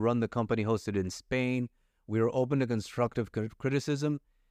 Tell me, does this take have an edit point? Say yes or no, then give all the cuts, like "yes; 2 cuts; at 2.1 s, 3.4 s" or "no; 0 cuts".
no; 0 cuts